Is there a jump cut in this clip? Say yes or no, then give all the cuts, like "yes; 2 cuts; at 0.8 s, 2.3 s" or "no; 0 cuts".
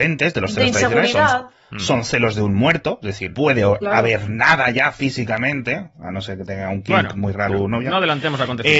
yes; 2 cuts; at 3.3 s, 7.5 s